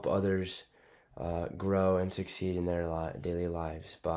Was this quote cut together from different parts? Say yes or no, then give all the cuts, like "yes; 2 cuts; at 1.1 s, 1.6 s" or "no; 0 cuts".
no; 0 cuts